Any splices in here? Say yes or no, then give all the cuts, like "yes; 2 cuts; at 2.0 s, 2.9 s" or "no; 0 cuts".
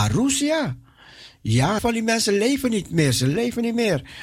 yes; 1 cut; at 1.8 s